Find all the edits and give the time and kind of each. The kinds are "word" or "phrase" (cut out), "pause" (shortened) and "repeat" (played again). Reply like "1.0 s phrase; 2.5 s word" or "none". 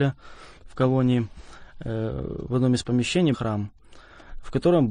3.3 s phrase